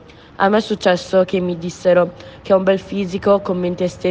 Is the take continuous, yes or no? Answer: yes